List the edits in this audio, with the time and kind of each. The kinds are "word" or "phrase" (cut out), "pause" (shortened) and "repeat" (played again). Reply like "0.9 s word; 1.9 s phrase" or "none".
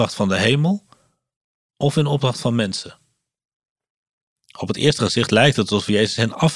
none